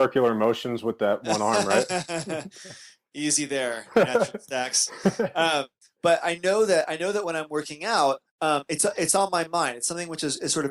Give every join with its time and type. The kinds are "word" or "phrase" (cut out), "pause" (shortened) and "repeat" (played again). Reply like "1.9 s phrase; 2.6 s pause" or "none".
5.8 s pause; 8.3 s pause